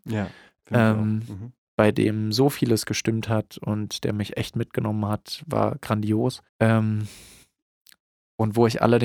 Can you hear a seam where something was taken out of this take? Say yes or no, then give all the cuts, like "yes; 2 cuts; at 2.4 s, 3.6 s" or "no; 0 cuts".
yes; 1 cut; at 6.5 s